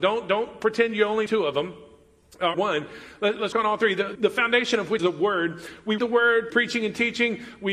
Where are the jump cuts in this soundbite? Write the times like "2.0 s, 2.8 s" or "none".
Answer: 1.3 s, 2.5 s, 3.5 s, 4.2 s, 5.0 s, 6.0 s, 6.5 s